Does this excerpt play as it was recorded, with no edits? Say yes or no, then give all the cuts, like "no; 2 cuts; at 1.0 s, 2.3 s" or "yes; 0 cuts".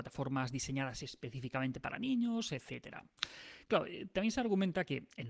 yes; 0 cuts